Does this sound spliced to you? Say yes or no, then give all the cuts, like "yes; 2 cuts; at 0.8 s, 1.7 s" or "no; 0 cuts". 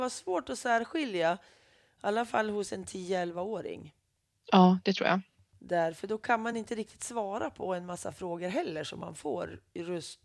no; 0 cuts